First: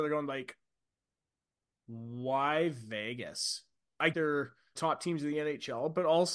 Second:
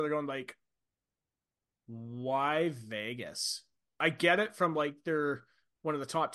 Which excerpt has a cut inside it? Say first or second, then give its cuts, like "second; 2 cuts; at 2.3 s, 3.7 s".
first; 2 cuts; at 4.1 s, 4.8 s